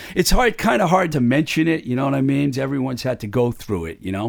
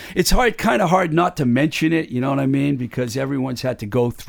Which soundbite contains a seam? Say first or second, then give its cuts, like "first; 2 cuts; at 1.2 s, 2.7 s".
first; 2 cuts; at 1.1 s, 2.5 s